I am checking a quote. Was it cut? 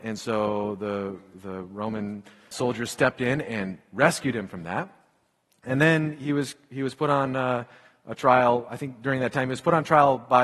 yes; 1 cut; at 2.5 s

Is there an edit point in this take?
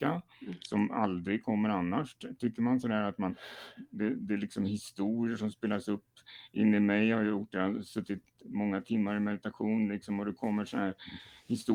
no; 0 cuts

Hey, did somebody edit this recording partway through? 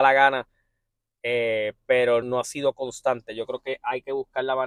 yes; 1 cut; at 2.2 s

